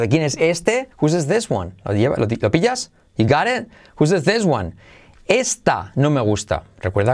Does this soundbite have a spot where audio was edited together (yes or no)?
yes